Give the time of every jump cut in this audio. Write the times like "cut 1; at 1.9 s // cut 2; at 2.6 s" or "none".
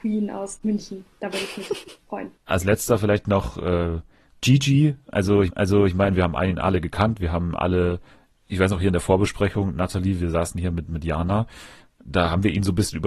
cut 1; at 2.4 s // cut 2; at 5.5 s